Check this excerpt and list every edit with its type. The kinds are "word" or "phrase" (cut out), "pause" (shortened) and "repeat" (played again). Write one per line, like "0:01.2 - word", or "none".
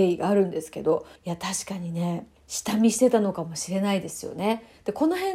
0:01.2 - pause
0:02.4 - pause